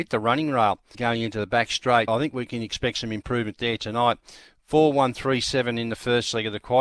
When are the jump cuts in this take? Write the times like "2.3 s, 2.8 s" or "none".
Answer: 0.9 s, 2.1 s